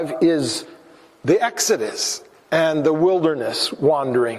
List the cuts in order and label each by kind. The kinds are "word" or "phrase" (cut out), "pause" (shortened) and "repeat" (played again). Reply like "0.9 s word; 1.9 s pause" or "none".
none

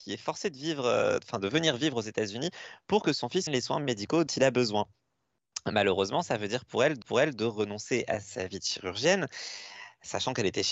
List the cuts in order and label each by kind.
3.5 s word; 4.3 s word; 7.0 s repeat

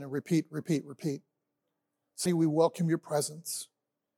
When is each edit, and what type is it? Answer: 2.3 s word

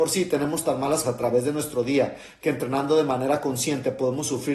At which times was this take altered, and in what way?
1.0 s word

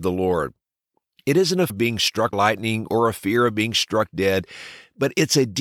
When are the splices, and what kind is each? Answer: 1.7 s word; 2.3 s word

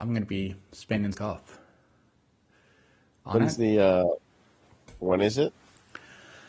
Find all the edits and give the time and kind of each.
1.1 s phrase

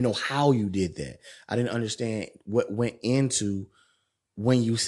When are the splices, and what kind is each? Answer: none

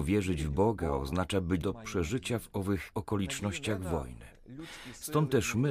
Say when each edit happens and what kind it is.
1.6 s word; 2.9 s word

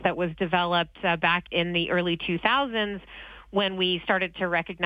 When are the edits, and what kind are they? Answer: 1.5 s word

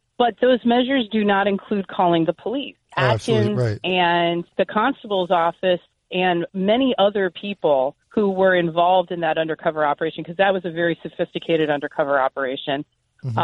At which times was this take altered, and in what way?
2.9 s pause; 4.5 s pause; 8.0 s pause

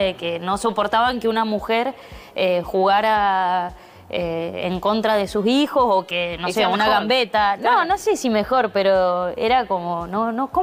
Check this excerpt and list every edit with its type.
none

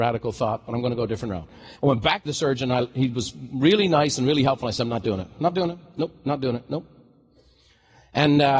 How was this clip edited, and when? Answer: 1.8 s pause; 2.3 s phrase

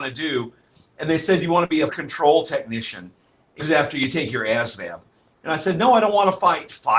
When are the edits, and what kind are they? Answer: 1.9 s word; 3.6 s word

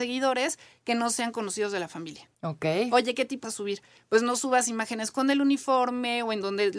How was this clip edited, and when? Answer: 3.4 s phrase

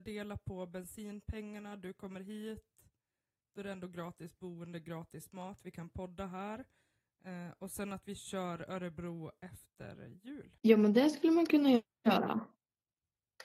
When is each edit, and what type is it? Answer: none

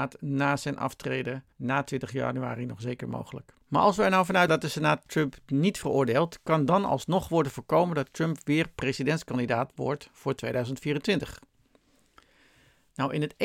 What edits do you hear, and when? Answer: 1.5 s pause; 3.6 s pause; 4.5 s word

